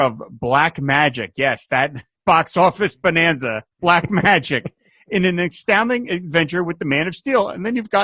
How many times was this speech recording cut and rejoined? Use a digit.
1